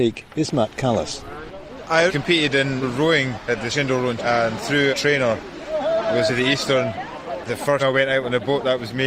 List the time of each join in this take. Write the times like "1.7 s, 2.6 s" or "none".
2.1 s, 2.8 s, 3.7 s, 4.2 s, 4.9 s, 6.3 s, 7.5 s, 7.8 s